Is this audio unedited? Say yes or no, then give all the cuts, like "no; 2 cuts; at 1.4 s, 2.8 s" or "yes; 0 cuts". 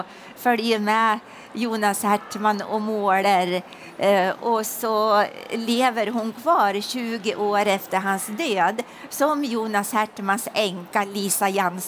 yes; 0 cuts